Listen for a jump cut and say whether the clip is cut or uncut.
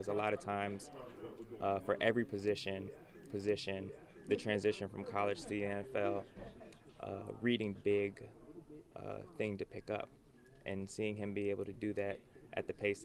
cut